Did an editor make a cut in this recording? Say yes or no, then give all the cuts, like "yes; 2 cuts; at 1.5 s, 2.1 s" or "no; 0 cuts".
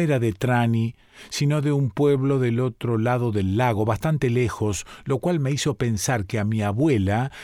no; 0 cuts